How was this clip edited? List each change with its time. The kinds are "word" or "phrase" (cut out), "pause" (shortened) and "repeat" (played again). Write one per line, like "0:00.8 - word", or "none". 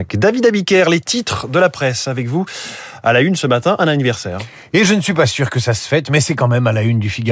none